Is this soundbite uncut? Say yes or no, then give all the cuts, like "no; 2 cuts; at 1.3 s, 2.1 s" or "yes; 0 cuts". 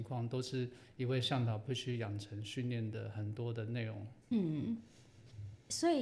no; 1 cut; at 4.2 s